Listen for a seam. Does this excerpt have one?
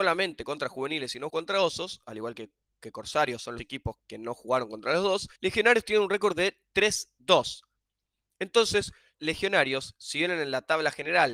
yes; 5 cuts; at 1.3 s, 3.6 s, 4.0 s, 5.4 s, 9.1 s

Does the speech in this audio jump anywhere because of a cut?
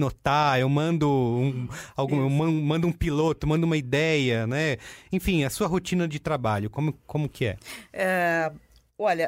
no; 0 cuts

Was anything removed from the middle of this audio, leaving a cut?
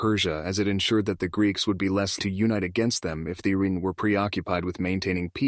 yes; 1 cut; at 2.2 s

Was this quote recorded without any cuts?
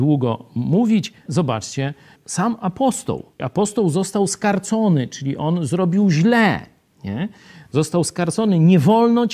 no; 3 cuts; at 1.3 s, 2.2 s, 3.4 s

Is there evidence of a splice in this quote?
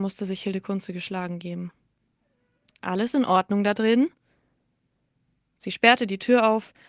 no; 0 cuts

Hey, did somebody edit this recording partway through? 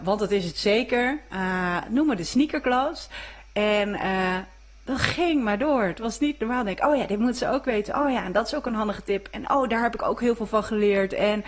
no; 0 cuts

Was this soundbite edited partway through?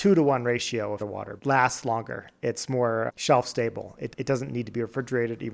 yes; 4 cuts; at 1.0 s, 1.4 s, 3.1 s, 4.1 s

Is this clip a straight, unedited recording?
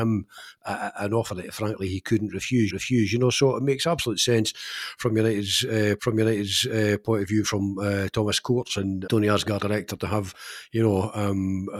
no; 4 cuts; at 2.7 s, 6.0 s, 9.1 s, 9.6 s

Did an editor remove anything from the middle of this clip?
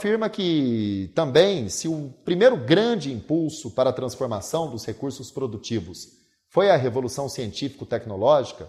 no; 0 cuts

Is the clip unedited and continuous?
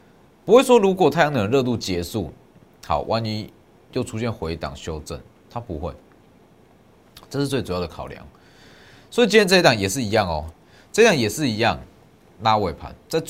yes; 0 cuts

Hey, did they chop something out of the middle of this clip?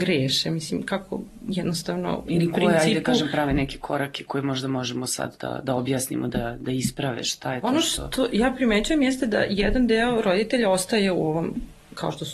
no; 0 cuts

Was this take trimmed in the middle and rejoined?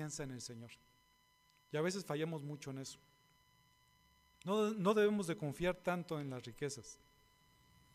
no; 0 cuts

